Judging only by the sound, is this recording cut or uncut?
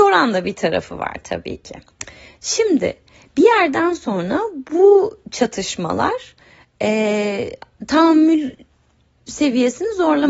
uncut